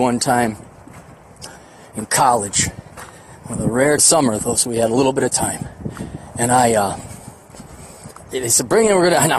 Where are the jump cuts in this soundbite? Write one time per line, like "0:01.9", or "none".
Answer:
0:04.0